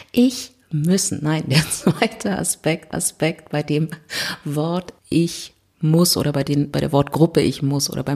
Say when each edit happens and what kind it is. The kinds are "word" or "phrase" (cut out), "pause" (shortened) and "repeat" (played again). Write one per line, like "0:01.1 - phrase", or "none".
0:02.9 - repeat
0:05.0 - pause